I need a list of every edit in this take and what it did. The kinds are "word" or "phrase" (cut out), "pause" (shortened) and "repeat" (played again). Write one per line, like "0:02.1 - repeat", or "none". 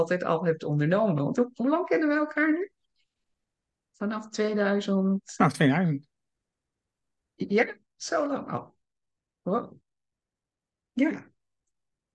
none